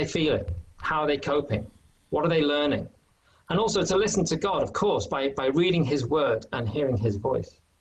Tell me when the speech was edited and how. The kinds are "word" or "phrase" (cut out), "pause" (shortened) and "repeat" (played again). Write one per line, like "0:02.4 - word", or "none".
none